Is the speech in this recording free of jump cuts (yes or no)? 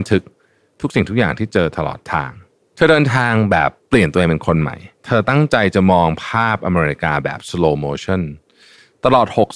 no